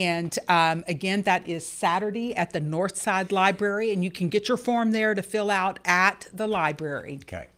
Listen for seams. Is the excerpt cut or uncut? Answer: uncut